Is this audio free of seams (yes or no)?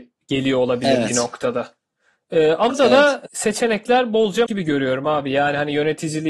no